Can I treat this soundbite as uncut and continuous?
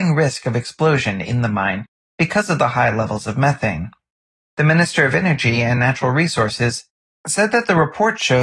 yes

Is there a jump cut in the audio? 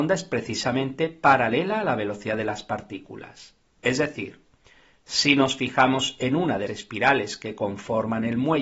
yes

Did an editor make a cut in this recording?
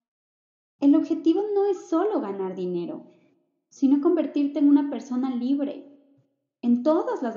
no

